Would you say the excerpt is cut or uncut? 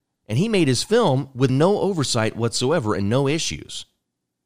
cut